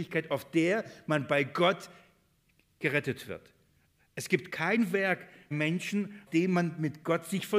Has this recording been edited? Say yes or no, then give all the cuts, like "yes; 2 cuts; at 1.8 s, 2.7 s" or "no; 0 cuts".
yes; 3 cuts; at 4.5 s, 5.5 s, 6.3 s